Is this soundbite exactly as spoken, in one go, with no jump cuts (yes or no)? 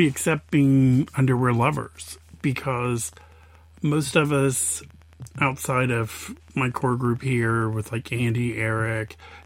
yes